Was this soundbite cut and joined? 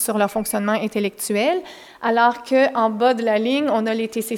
no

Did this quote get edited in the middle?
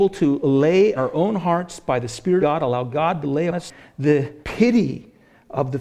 yes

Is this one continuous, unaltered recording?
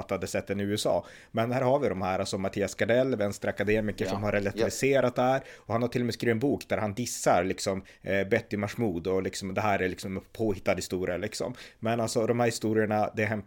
yes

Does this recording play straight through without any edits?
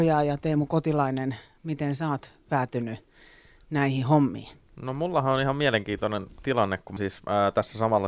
no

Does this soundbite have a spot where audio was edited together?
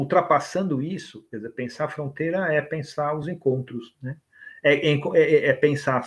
no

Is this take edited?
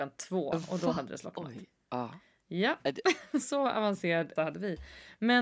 yes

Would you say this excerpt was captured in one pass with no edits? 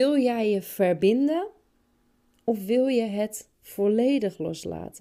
yes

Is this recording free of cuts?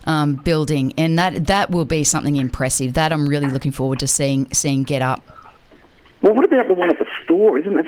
yes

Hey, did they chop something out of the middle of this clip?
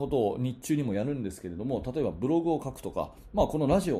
no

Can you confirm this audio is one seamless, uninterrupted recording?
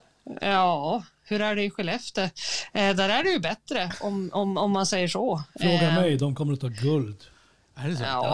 yes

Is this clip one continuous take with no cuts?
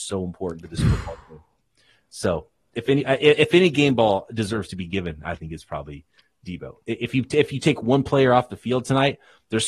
yes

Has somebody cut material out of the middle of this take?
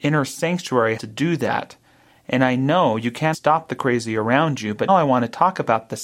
yes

